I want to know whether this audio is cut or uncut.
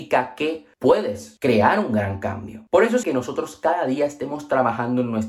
cut